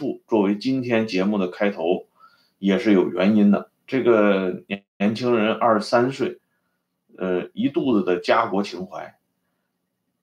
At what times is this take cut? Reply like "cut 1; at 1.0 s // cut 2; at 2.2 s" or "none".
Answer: cut 1; at 4.9 s